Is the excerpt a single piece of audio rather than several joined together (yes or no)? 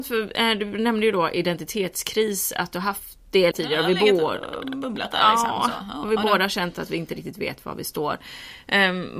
no